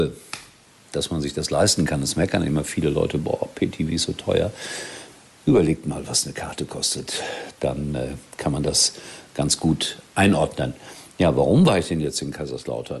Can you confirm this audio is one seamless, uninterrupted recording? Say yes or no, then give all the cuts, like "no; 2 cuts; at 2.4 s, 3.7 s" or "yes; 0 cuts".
yes; 0 cuts